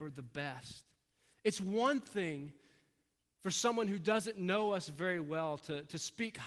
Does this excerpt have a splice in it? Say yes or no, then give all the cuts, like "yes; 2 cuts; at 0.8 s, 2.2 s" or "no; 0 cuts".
no; 0 cuts